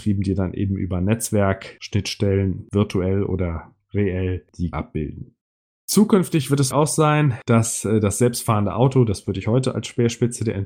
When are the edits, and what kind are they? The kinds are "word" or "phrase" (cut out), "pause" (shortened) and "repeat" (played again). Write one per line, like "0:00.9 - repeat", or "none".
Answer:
0:04.7 - word
0:06.7 - word